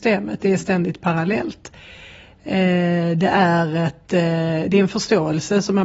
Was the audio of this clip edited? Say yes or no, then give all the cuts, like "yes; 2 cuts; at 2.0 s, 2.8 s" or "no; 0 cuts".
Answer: no; 0 cuts